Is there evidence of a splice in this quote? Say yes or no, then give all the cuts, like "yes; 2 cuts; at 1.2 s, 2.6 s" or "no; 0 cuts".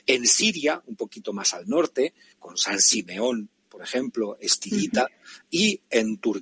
no; 0 cuts